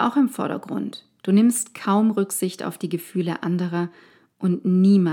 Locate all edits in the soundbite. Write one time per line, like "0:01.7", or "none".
none